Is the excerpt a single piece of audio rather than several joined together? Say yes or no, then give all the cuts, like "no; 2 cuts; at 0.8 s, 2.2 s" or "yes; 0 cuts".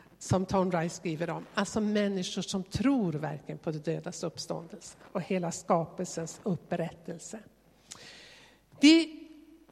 yes; 0 cuts